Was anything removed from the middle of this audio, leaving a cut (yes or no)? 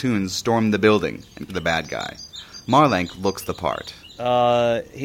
yes